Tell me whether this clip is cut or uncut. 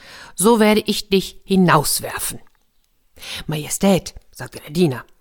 uncut